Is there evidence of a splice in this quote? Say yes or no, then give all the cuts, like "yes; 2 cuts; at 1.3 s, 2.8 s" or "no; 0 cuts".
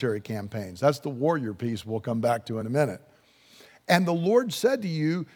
no; 0 cuts